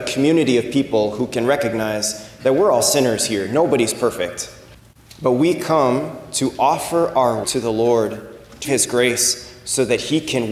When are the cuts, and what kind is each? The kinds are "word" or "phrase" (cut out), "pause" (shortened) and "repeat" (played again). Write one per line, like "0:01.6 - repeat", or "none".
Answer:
0:04.7 - pause
0:07.4 - word
0:08.6 - word